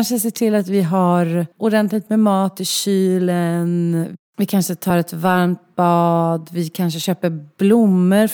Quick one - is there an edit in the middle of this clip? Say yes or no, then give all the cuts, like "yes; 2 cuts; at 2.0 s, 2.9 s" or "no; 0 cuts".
no; 0 cuts